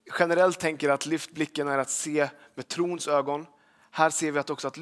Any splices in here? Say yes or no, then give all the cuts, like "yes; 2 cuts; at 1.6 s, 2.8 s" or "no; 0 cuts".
no; 0 cuts